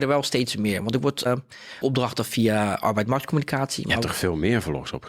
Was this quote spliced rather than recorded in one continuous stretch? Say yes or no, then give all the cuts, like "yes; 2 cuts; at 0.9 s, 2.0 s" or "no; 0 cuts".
yes; 2 cuts; at 1.3 s, 1.8 s